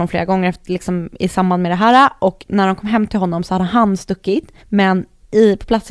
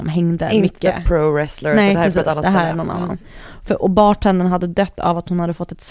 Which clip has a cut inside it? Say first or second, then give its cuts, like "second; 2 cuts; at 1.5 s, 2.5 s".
first; 1 cut; at 4.6 s